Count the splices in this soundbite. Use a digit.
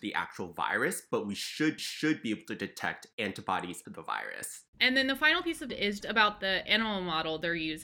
5